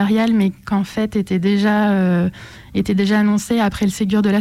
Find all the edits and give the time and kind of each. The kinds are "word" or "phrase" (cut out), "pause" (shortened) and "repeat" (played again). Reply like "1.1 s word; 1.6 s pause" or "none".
none

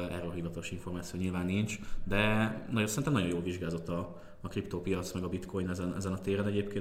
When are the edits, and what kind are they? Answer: none

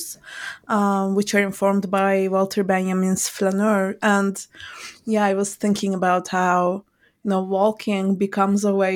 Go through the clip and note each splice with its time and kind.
none

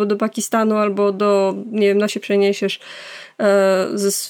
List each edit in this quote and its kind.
2.1 s word

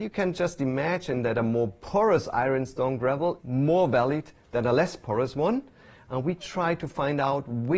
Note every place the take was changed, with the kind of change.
3.4 s word

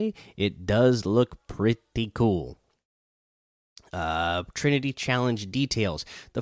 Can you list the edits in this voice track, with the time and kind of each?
none

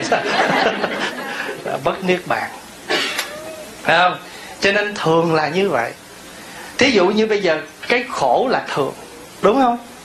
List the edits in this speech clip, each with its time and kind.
8.7 s word

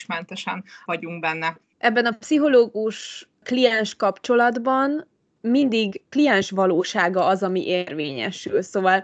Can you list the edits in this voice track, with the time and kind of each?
none

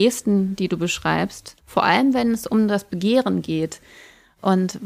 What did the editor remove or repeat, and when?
1.6 s pause

